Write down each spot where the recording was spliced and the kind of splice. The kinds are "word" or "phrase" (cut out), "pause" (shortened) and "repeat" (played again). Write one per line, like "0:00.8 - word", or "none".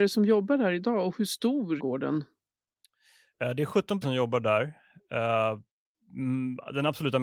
0:01.8 - word
0:04.0 - word